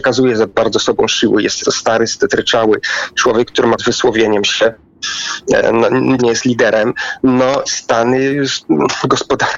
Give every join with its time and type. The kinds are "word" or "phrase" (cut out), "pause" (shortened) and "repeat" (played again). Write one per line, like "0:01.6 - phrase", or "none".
0:01.6 - word
0:03.8 - word
0:06.2 - word
0:07.7 - word